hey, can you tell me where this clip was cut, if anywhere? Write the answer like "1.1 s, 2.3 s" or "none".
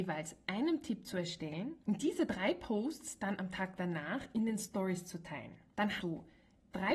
1.8 s, 6.0 s